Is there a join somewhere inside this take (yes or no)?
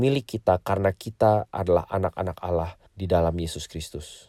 yes